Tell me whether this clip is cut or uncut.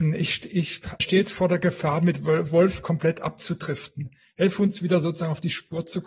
cut